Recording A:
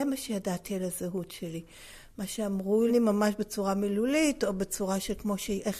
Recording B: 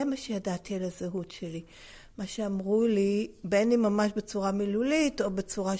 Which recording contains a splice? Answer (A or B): A